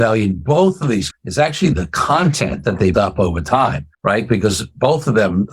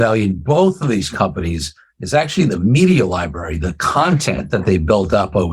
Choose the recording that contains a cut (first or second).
first